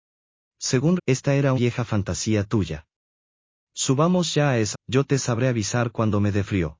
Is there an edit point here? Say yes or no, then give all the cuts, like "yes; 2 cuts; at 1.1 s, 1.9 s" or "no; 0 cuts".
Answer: yes; 3 cuts; at 1.0 s, 1.6 s, 4.7 s